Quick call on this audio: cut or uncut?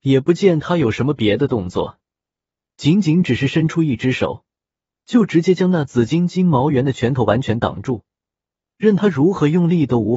uncut